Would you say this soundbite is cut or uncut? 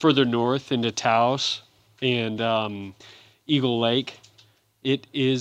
uncut